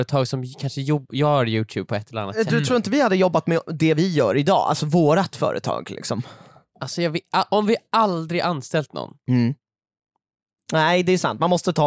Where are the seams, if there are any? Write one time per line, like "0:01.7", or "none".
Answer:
none